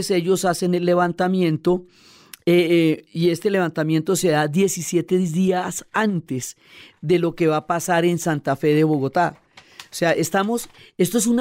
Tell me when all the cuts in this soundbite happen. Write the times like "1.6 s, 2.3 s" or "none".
none